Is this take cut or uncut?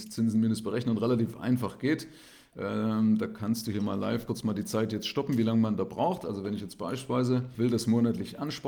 cut